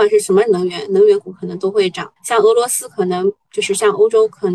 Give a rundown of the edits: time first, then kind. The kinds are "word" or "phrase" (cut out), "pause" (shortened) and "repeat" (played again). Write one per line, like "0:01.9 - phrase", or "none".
0:02.2 - pause